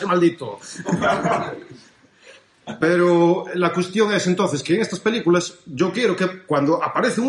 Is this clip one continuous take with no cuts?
yes; 0 cuts

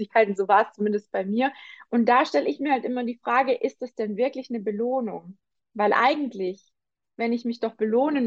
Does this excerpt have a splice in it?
no; 0 cuts

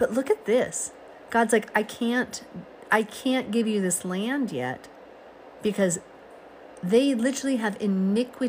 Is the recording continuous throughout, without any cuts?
no; 1 cut; at 1.7 s

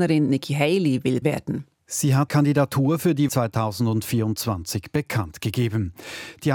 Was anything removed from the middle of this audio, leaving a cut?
yes; 3 cuts; at 1.2 s, 2.3 s, 3.3 s

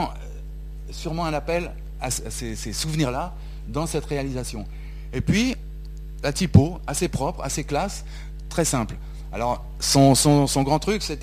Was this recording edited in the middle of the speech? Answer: no; 0 cuts

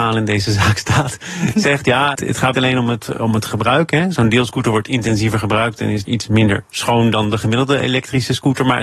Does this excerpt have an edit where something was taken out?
yes; 3 cuts; at 2.2 s, 2.5 s, 6.1 s

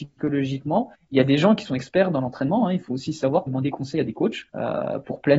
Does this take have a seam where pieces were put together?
yes; 4 cuts; at 0.9 s, 2.8 s, 3.5 s, 4.5 s

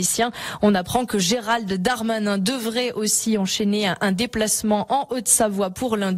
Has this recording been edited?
no; 0 cuts

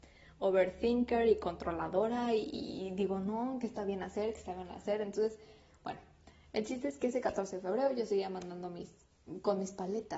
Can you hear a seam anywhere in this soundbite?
no; 0 cuts

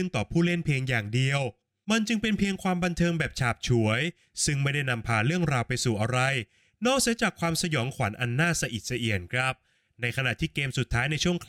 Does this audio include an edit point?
no; 0 cuts

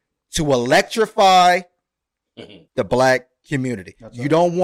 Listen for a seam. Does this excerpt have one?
yes; 1 cut; at 2.7 s

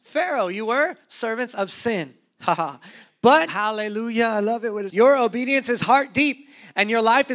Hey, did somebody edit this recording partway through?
yes; 2 cuts; at 3.5 s, 4.9 s

